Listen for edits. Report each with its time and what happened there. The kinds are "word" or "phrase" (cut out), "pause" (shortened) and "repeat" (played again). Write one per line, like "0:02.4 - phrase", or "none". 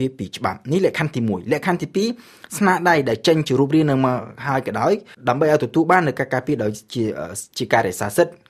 0:05.1 - pause